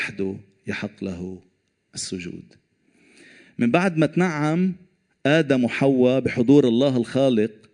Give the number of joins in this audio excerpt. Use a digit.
0